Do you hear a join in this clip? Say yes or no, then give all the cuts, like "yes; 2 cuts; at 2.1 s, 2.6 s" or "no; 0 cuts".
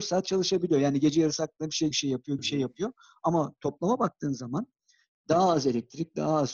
yes; 2 cuts; at 1.9 s, 2.4 s